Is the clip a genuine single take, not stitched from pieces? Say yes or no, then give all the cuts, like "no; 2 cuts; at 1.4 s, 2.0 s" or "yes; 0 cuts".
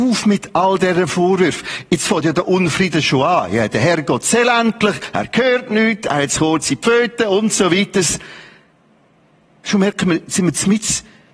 yes; 0 cuts